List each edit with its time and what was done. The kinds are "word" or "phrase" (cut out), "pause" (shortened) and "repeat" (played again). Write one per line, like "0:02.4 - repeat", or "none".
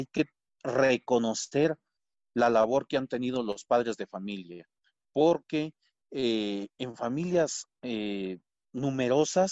none